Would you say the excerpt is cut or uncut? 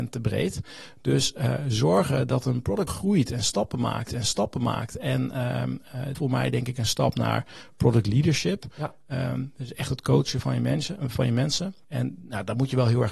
cut